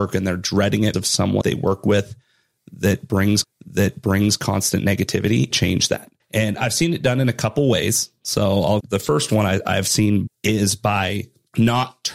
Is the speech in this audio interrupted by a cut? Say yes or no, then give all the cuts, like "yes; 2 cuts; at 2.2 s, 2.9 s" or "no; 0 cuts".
yes; 7 cuts; at 0.9 s, 1.4 s, 3.4 s, 5.5 s, 6.2 s, 8.8 s, 10.3 s